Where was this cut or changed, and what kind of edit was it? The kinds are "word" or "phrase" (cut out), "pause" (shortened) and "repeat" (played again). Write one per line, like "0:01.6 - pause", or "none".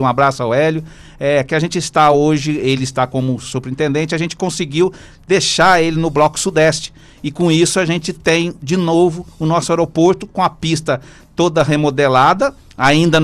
none